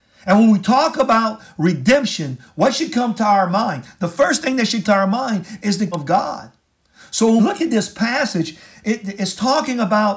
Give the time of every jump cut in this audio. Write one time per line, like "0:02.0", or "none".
0:04.8
0:05.9
0:07.4